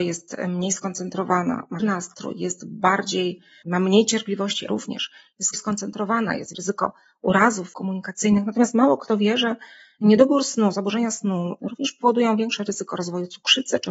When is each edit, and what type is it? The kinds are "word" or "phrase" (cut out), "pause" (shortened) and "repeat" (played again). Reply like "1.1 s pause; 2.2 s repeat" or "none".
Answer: 1.8 s word; 3.6 s word; 4.7 s word; 5.5 s word; 6.5 s word; 7.7 s word